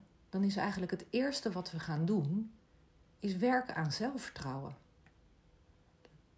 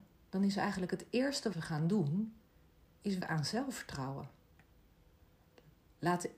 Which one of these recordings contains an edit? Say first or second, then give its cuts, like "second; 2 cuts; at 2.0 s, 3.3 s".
second; 2 cuts; at 1.5 s, 3.2 s